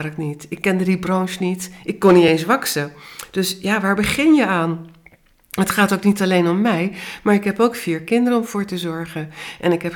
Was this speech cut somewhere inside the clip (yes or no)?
no